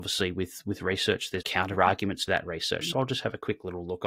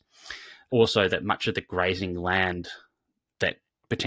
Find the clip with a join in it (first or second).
first